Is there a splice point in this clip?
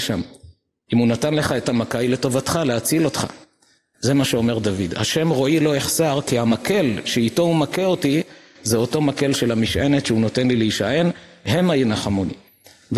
no; 0 cuts

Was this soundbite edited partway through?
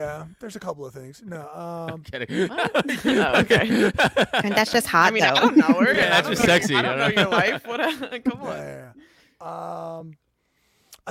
no; 0 cuts

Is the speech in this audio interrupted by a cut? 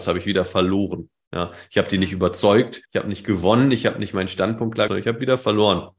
yes; 2 cuts; at 2.8 s, 4.9 s

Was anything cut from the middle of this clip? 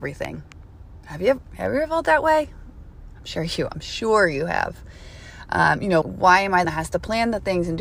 yes; 2 cuts; at 6.0 s, 6.6 s

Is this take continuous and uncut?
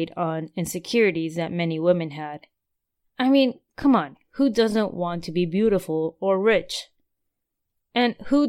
yes; 0 cuts

